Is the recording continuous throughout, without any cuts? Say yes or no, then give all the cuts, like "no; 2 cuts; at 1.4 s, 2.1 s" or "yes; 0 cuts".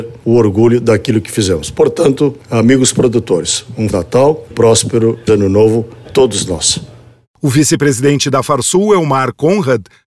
no; 4 cuts; at 3.9 s, 4.5 s, 5.3 s, 6.0 s